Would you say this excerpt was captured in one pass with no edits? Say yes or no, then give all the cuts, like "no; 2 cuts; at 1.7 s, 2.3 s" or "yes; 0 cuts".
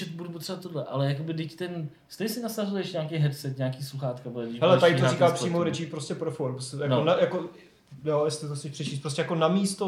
yes; 0 cuts